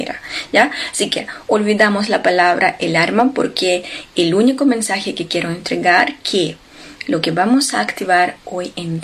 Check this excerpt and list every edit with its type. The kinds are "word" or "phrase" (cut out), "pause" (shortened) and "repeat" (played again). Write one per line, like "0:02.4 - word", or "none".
none